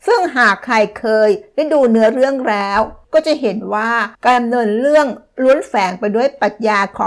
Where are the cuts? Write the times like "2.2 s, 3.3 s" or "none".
3.0 s, 4.1 s